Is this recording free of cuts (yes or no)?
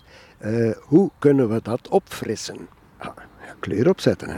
no